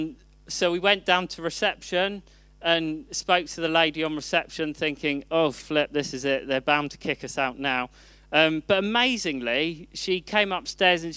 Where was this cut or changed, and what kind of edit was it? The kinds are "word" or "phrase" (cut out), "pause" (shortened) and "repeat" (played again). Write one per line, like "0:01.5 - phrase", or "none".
none